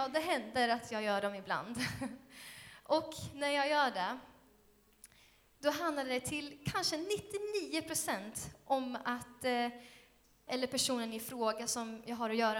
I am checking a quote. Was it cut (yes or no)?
yes